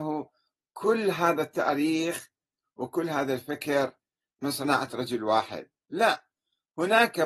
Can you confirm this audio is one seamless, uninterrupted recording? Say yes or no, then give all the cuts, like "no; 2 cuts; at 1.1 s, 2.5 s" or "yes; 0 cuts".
yes; 0 cuts